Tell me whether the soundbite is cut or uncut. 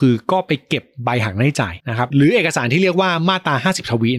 cut